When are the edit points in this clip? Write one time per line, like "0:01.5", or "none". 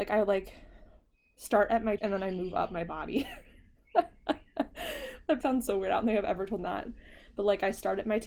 0:02.0
0:05.4
0:06.6